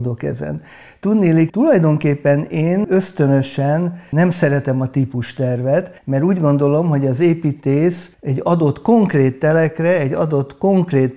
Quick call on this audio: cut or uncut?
cut